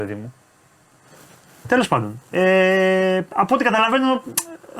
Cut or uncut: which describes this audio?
uncut